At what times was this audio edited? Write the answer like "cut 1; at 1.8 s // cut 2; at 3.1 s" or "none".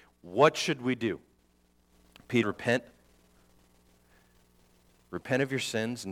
cut 1; at 2.4 s